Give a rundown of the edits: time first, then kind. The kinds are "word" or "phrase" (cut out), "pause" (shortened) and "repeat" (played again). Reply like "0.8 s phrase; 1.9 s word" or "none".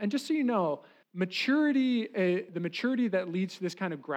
1.0 s pause; 2.5 s word